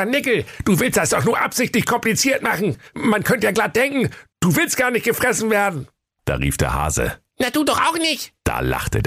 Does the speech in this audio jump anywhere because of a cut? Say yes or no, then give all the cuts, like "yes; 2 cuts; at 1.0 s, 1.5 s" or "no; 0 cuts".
no; 0 cuts